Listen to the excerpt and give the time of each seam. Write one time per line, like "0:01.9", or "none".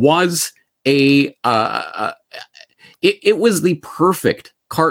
none